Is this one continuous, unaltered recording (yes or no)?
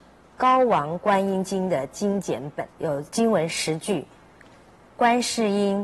no